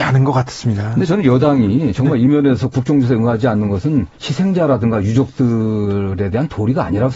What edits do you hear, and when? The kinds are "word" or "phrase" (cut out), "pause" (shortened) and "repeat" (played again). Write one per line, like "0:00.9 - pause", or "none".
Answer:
0:04.1 - pause